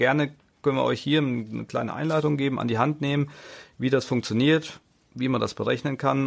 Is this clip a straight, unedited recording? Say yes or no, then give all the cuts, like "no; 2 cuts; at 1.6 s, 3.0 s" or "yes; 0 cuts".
yes; 0 cuts